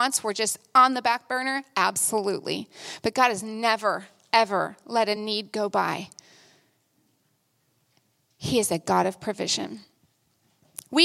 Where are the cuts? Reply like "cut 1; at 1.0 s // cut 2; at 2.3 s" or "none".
none